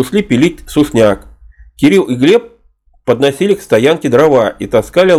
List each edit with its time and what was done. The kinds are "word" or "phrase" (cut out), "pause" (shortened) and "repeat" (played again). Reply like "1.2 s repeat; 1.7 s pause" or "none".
none